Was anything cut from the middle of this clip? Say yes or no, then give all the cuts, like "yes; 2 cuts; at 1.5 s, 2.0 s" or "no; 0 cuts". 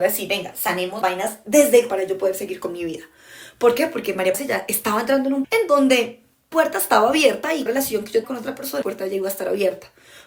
yes; 8 cuts; at 1.0 s, 1.9 s, 4.3 s, 5.4 s, 6.5 s, 7.7 s, 8.2 s, 8.8 s